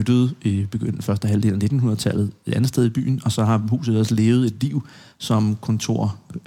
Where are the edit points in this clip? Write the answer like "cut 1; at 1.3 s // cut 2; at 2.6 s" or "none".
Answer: none